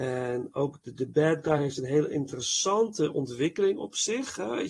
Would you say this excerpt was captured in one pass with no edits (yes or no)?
yes